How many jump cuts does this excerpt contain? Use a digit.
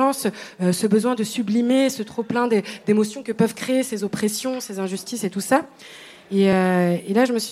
0